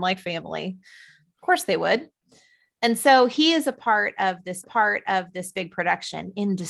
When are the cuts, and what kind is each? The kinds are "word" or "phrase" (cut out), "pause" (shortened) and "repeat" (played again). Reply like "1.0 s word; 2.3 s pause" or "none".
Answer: 4.6 s repeat